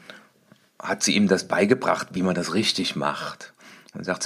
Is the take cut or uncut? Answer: uncut